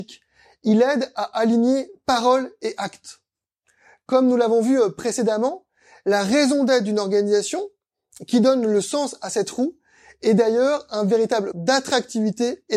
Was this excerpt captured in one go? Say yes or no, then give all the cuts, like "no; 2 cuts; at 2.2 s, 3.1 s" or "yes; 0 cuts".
no; 1 cut; at 11.5 s